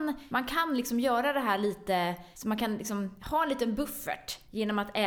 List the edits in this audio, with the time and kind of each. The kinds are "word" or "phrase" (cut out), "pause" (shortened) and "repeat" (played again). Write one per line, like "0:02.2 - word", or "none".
none